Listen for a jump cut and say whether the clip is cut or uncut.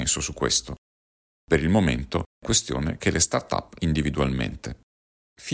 cut